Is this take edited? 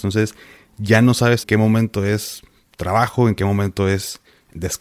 yes; 1 cut; at 1.4 s

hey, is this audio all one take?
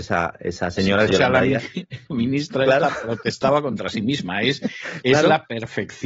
no; 2 cuts; at 1.1 s, 2.1 s

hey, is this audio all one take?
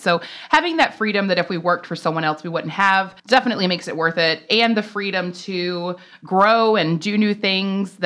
no; 1 cut; at 3.2 s

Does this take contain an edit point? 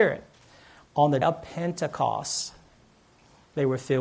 yes; 1 cut; at 1.2 s

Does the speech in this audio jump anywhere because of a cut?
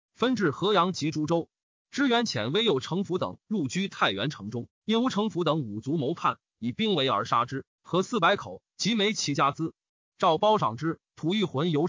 no; 0 cuts

